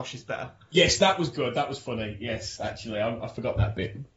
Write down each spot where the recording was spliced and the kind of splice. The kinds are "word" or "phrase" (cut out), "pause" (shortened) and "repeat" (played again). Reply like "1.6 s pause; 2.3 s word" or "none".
none